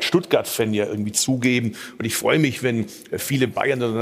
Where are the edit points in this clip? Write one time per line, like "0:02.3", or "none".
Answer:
none